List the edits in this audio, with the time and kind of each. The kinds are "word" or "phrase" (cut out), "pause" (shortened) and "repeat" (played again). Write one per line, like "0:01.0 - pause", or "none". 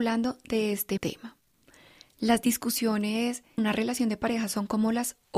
0:01.0 - word
0:03.6 - word